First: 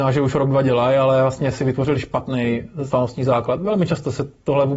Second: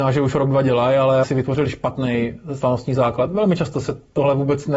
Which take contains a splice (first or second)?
second